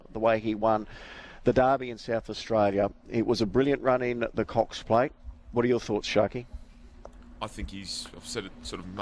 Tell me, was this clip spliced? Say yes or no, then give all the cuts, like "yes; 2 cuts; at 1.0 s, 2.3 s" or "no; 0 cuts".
no; 0 cuts